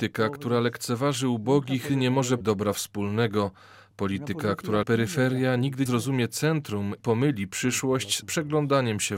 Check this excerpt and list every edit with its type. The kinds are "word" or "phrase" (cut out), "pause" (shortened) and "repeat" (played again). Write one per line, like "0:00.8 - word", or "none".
0:01.9 - word
0:02.4 - word
0:04.8 - word
0:05.9 - word
0:07.0 - word
0:08.2 - word